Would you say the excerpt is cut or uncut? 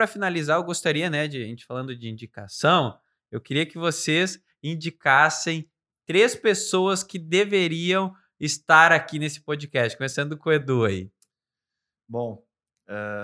uncut